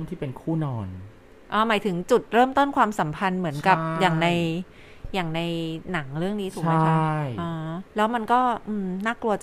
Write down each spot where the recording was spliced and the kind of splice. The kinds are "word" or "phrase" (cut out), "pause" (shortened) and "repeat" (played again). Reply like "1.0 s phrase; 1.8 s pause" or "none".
1.3 s pause; 7.9 s pause